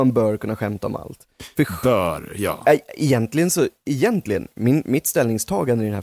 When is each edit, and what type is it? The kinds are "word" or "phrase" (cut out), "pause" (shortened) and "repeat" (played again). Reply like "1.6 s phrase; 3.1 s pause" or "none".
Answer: none